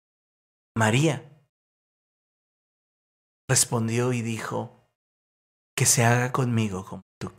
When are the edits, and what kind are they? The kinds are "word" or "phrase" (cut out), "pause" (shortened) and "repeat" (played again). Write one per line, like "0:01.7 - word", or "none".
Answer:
none